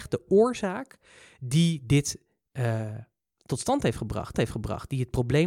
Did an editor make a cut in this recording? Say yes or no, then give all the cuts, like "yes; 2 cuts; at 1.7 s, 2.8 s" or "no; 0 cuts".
yes; 1 cut; at 4.3 s